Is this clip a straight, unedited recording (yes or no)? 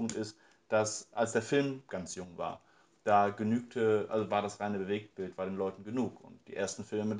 yes